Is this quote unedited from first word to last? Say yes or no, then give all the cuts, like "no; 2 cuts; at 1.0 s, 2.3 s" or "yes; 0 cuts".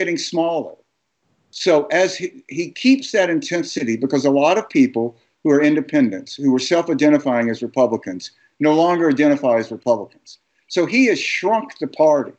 yes; 0 cuts